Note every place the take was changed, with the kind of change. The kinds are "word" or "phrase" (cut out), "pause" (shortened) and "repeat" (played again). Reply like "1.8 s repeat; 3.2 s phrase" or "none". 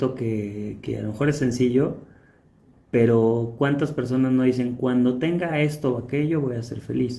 none